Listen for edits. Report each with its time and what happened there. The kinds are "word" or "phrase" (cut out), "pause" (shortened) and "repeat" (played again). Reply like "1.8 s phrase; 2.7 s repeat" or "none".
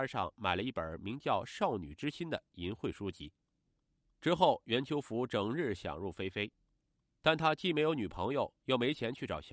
none